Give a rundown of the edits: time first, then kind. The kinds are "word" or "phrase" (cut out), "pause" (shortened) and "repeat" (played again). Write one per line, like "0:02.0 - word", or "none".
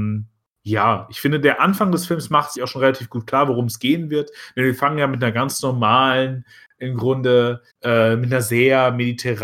0:02.6 - word
0:07.7 - pause